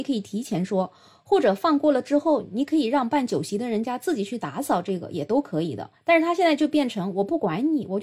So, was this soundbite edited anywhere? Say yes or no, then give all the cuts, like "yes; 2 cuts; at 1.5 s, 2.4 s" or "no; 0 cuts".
no; 0 cuts